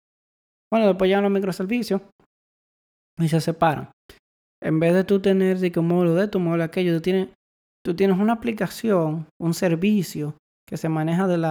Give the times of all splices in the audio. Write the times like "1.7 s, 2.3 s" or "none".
none